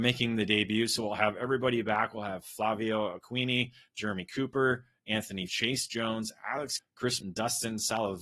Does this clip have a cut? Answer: yes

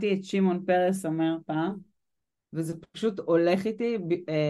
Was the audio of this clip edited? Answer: no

